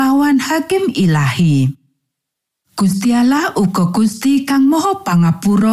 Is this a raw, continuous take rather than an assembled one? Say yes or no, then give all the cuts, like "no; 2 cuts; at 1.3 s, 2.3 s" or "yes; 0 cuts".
yes; 0 cuts